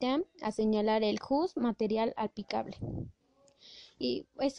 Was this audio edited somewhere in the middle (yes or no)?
no